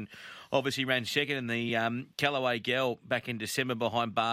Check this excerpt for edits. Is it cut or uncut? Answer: uncut